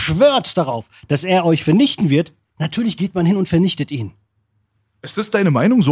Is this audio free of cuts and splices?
yes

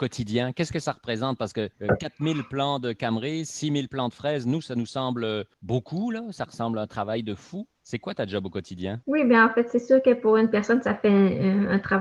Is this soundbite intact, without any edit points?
no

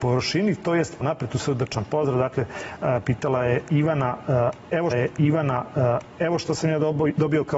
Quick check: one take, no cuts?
no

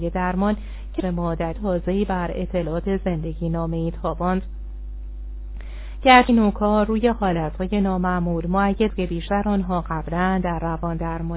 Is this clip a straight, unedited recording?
no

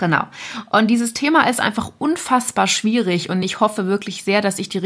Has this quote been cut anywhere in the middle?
no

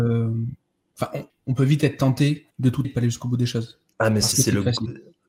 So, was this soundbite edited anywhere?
yes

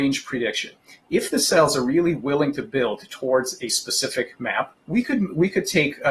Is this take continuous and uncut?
no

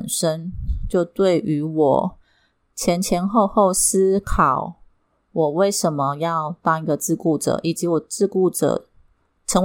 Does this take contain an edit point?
no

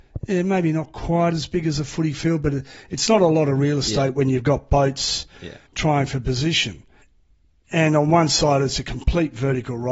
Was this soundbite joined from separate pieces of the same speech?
yes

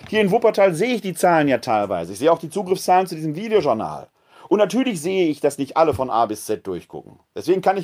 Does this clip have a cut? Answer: no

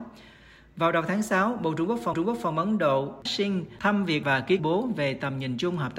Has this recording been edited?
yes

